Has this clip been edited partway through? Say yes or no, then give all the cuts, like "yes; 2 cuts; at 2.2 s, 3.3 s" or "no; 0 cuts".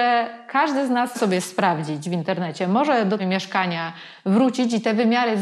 yes; 2 cuts; at 1.1 s, 3.2 s